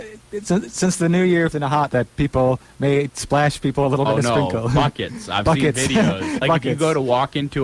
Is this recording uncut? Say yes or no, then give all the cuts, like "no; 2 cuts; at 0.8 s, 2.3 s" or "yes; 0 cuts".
no; 5 cuts; at 1.5 s, 1.9 s, 3.1 s, 4.1 s, 6.4 s